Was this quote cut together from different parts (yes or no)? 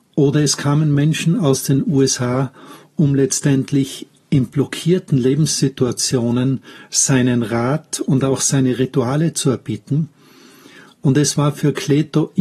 no